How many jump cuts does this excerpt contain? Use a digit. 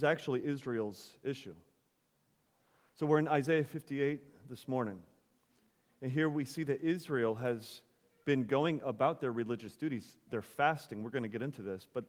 0